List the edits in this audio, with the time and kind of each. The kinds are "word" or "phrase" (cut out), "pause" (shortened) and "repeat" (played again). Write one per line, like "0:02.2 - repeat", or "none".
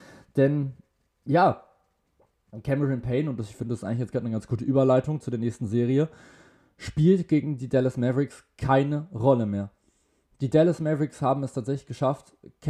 none